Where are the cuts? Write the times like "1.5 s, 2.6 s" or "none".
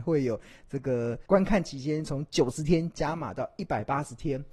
1.3 s